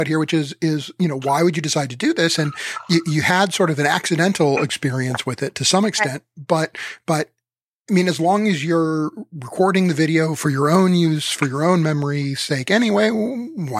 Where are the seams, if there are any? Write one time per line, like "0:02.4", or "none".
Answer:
none